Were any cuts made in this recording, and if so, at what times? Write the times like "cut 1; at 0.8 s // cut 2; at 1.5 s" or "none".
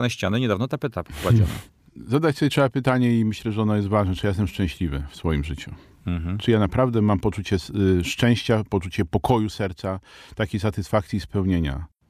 none